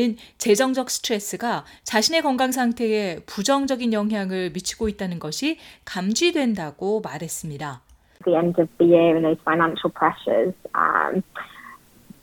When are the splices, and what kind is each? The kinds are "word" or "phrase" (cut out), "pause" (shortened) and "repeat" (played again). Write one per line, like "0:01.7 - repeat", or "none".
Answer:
none